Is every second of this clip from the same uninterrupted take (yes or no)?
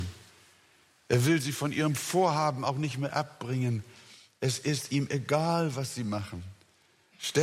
yes